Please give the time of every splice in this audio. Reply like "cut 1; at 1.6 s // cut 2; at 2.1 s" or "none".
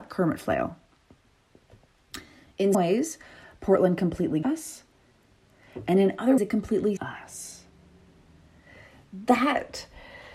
cut 1; at 2.7 s // cut 2; at 4.4 s // cut 3; at 6.4 s // cut 4; at 7.0 s